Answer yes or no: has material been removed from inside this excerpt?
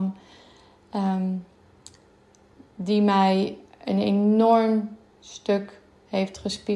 no